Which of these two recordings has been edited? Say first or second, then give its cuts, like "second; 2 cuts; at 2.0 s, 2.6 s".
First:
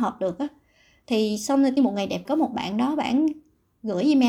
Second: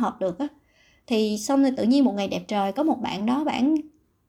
first; 2 cuts; at 1.8 s, 2.2 s